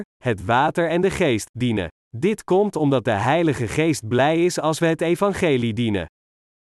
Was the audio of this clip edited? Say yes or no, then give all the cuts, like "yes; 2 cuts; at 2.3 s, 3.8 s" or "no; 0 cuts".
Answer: yes; 1 cut; at 2.0 s